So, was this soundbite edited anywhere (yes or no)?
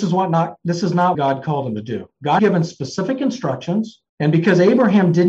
yes